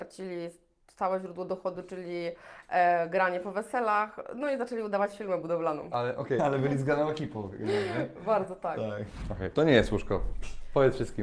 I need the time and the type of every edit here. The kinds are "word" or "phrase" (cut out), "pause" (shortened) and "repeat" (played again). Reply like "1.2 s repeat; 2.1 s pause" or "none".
6.4 s word